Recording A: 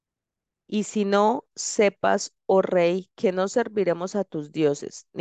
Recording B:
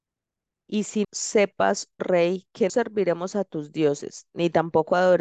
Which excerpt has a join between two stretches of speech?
B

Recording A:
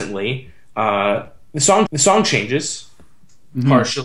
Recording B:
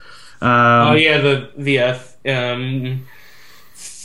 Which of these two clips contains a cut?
A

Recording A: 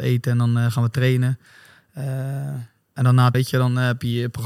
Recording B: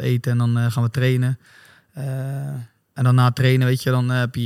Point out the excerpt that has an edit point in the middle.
A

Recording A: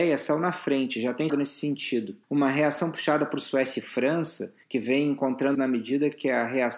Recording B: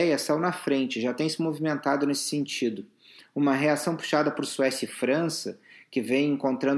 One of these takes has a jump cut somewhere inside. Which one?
A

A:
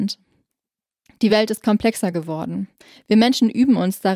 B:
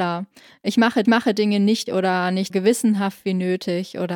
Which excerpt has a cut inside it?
B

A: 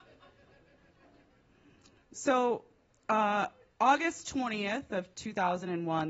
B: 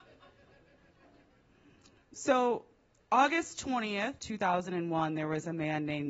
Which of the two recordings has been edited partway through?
B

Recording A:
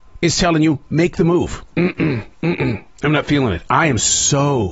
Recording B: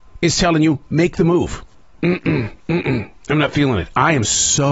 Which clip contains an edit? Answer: A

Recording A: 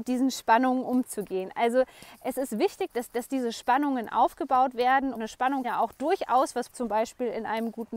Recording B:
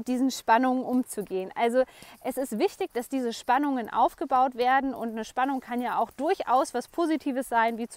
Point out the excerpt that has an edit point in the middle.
A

